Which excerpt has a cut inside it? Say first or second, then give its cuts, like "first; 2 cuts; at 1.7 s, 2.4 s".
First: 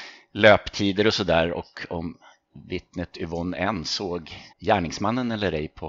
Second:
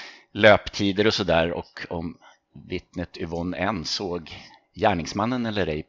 first; 1 cut; at 4.5 s